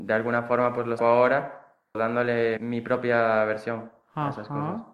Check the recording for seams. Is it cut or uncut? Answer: cut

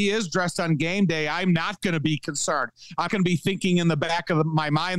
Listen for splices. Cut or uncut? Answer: cut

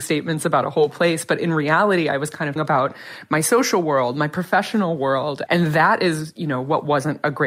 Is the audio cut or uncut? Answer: cut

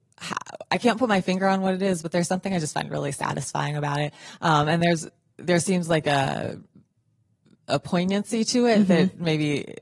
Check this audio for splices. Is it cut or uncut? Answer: uncut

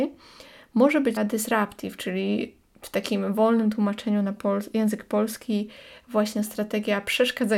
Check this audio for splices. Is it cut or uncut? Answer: cut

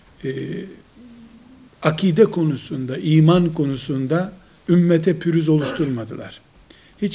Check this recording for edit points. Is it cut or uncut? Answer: uncut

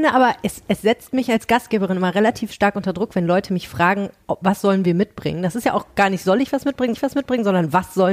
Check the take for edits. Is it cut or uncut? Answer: cut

